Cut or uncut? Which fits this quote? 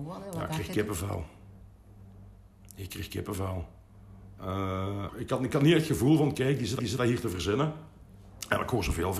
cut